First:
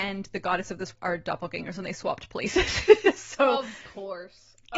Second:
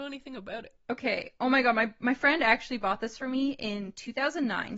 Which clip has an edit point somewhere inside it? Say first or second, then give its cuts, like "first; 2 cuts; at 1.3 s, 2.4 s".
first; 1 cut; at 0.9 s